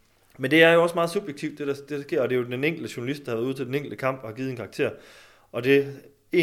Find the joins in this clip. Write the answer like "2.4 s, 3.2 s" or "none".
none